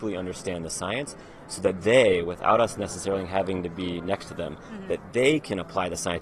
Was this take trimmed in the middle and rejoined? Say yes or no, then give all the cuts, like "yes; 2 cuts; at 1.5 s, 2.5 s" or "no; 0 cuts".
no; 0 cuts